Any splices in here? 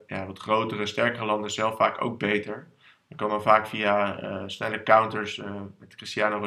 no; 0 cuts

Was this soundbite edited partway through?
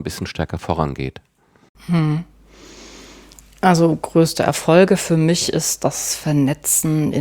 no; 0 cuts

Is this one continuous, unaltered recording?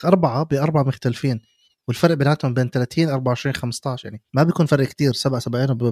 no; 1 cut; at 4.3 s

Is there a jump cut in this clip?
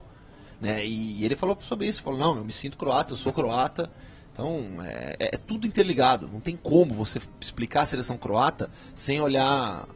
no; 0 cuts

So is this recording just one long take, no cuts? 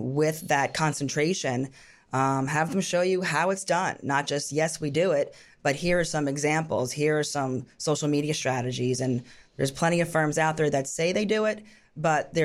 yes; 0 cuts

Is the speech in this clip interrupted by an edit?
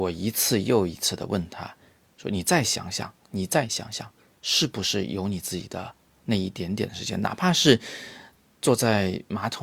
no; 0 cuts

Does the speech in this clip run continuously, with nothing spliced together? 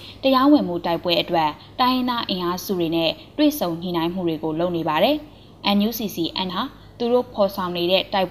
no; 1 cut; at 6.5 s

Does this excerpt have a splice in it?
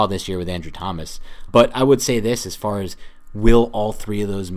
yes; 1 cut; at 1.5 s

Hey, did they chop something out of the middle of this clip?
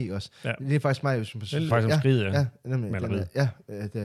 yes; 1 cut; at 1.7 s

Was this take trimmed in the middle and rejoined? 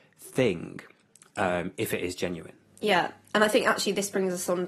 no; 0 cuts

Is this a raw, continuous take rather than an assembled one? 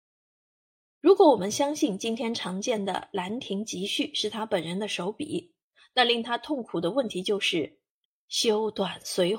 yes; 0 cuts

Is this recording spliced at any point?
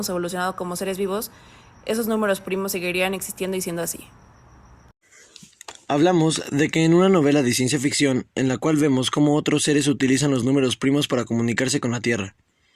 no; 0 cuts

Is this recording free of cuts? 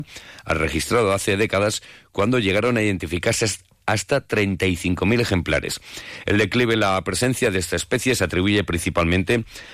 yes; 0 cuts

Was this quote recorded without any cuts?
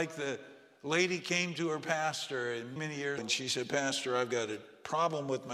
no; 2 cuts; at 2.8 s, 3.2 s

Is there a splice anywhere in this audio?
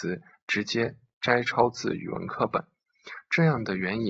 no; 0 cuts

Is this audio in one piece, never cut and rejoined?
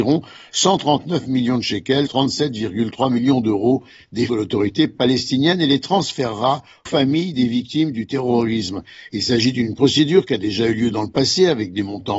no; 3 cuts; at 2.1 s, 4.3 s, 6.9 s

